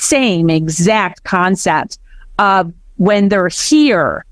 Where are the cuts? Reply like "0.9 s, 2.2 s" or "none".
none